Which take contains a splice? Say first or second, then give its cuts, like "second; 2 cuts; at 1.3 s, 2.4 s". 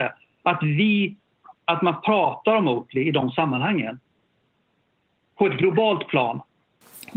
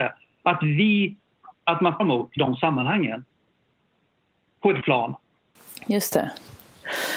second; 3 cuts; at 2.0 s, 2.4 s, 4.8 s